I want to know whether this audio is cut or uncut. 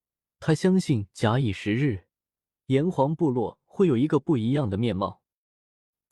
uncut